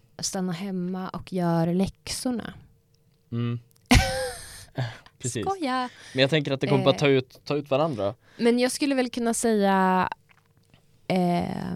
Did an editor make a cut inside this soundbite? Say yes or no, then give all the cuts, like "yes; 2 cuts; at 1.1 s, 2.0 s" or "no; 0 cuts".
no; 0 cuts